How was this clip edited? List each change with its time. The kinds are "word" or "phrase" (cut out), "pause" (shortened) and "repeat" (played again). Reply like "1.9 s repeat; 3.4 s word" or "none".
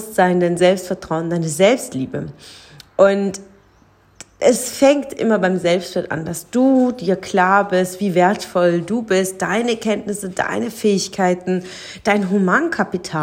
none